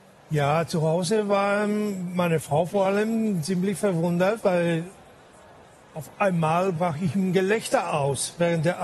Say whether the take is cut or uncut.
uncut